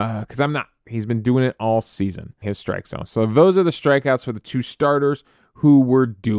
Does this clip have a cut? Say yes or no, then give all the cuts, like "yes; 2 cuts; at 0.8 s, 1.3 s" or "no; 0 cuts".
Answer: yes; 1 cut; at 2.4 s